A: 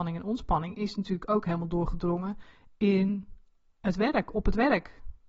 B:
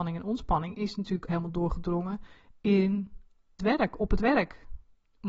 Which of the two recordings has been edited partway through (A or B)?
B